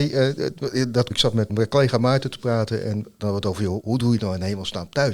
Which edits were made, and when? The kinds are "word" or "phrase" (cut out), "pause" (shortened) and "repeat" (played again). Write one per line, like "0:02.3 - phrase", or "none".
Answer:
0:01.1 - word
0:01.5 - word
0:03.8 - word
0:04.2 - word